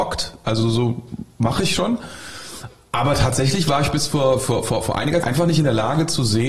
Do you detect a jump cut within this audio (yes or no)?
yes